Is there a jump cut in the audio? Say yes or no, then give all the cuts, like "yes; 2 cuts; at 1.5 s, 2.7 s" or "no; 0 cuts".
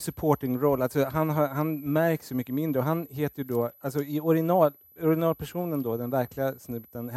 no; 0 cuts